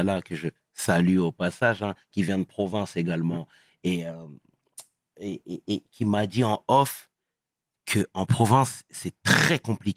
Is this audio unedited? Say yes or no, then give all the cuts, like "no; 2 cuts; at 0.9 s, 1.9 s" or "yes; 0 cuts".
yes; 0 cuts